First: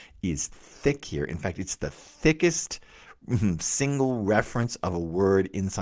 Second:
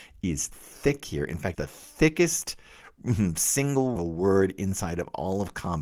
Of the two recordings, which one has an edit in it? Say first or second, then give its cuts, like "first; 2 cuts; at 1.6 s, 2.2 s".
second; 2 cuts; at 1.5 s, 4.0 s